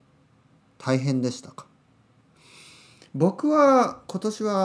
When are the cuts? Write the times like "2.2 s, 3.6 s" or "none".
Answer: none